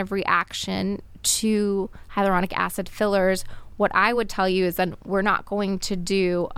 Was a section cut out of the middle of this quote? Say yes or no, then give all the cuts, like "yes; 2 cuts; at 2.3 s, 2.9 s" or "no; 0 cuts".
no; 0 cuts